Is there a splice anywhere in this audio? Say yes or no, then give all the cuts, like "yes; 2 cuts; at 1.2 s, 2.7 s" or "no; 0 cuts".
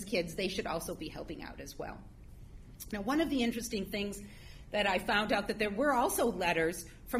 no; 0 cuts